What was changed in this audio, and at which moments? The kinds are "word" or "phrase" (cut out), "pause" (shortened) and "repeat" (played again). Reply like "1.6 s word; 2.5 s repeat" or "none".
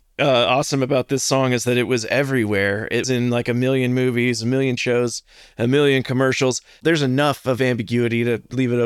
3.0 s word; 4.8 s word